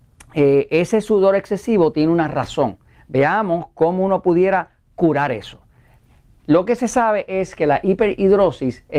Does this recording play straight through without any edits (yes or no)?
yes